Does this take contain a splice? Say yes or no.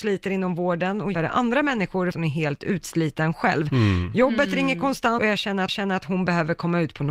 yes